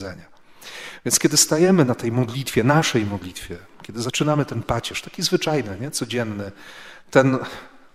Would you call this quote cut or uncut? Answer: uncut